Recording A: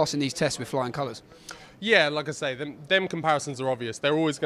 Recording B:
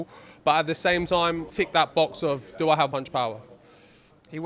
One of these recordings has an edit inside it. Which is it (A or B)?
B